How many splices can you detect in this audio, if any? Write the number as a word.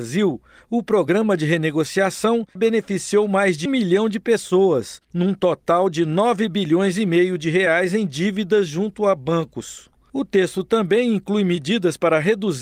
three